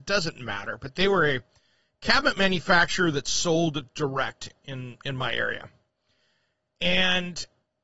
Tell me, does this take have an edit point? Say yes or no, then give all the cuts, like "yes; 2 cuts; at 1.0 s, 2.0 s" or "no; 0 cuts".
no; 0 cuts